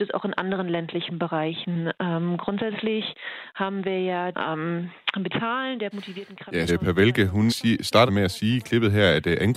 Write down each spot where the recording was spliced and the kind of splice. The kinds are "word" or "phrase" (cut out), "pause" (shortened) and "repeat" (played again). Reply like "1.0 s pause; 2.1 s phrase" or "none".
4.3 s word; 5.3 s word; 5.9 s word; 6.7 s word; 7.5 s word; 8.1 s word